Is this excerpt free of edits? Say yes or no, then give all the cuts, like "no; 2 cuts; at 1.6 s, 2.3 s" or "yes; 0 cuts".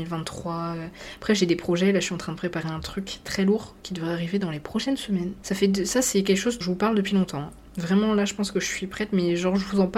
no; 1 cut; at 6.6 s